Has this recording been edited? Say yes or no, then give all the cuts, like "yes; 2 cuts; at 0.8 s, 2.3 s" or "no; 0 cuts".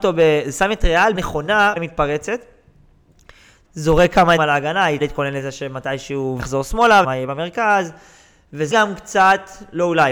yes; 8 cuts; at 1.1 s, 1.8 s, 3.6 s, 4.4 s, 5.0 s, 6.4 s, 7.0 s, 8.7 s